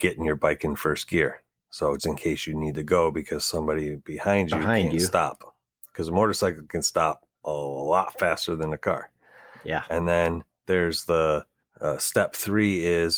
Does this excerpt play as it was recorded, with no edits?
no; 2 cuts; at 2.0 s, 7.3 s

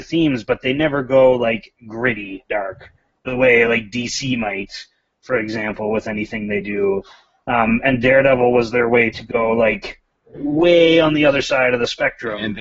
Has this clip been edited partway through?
no; 0 cuts

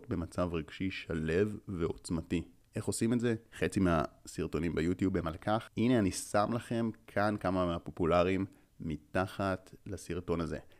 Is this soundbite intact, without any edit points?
yes; 0 cuts

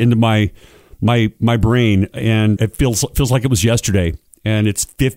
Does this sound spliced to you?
yes; 1 cut; at 2.6 s

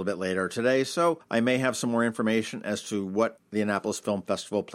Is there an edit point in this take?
no; 0 cuts

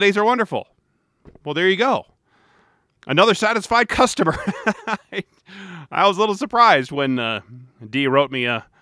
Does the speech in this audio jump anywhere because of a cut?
no; 0 cuts

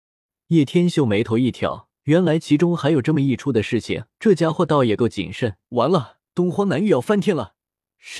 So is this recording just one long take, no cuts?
no; 4 cuts; at 2.0 s, 4.1 s, 5.6 s, 6.3 s

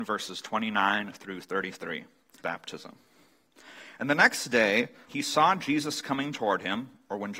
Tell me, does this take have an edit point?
yes; 2 cuts; at 2.4 s, 5.1 s

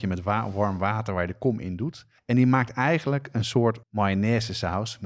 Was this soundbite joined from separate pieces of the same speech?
yes; 2 cuts; at 2.2 s, 3.8 s

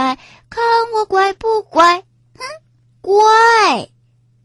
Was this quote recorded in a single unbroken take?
yes; 0 cuts

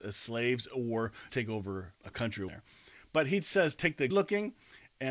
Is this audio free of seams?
no; 4 cuts; at 1.3 s, 2.0 s, 2.5 s, 4.1 s

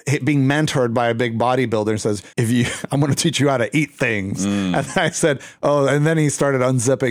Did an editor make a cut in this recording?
yes; 1 cut; at 2.3 s

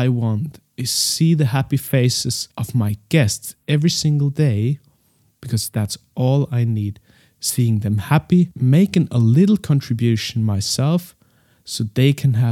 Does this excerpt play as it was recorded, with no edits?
yes; 0 cuts

